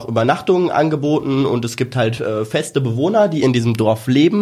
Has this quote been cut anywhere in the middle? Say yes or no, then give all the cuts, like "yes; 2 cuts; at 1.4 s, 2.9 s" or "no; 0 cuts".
no; 0 cuts